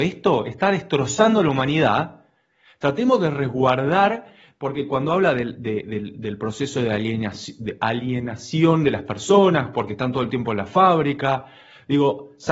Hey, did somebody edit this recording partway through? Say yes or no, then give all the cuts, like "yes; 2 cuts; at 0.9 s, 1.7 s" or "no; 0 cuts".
no; 0 cuts